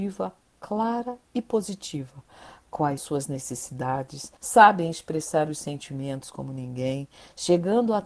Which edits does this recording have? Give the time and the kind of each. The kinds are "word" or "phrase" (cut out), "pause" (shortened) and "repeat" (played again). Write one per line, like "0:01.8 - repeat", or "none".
0:03.0 - word
0:04.4 - pause

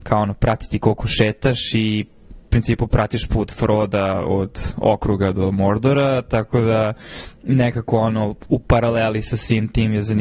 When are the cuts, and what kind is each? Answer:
none

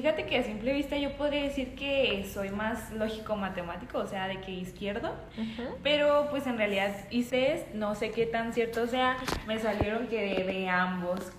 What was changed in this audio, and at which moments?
0:07.3 - word

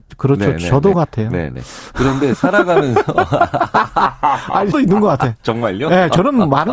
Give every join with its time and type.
0:00.9 - phrase
0:04.7 - word

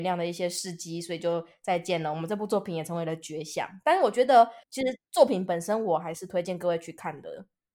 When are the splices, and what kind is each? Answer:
0:04.6 - pause

